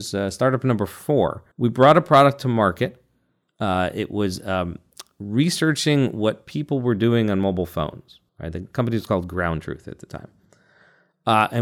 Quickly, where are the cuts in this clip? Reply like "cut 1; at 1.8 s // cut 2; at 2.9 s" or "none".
cut 1; at 1.5 s // cut 2; at 8.3 s

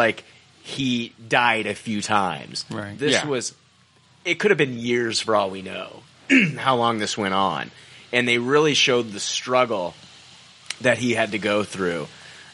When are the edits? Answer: none

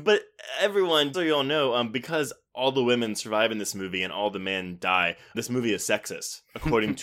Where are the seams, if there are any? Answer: cut 1; at 1.1 s // cut 2; at 5.3 s

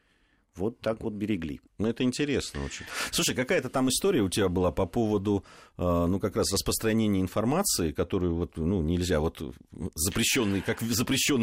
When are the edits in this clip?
cut 1; at 1.7 s

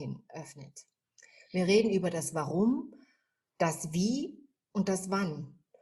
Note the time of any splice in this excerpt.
none

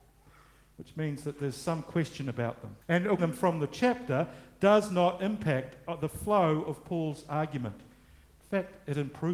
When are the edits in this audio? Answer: cut 1; at 2.8 s // cut 2; at 3.2 s

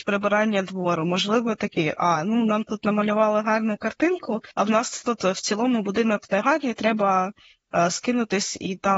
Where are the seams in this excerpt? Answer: cut 1; at 4.5 s

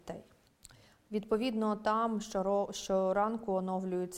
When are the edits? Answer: none

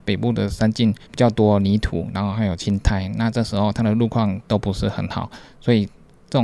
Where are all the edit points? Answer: cut 1; at 1.1 s

